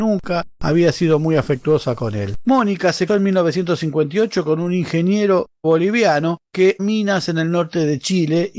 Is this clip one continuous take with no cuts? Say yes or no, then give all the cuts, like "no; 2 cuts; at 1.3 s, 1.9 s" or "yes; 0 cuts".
no; 3 cuts; at 3.1 s, 5.6 s, 6.8 s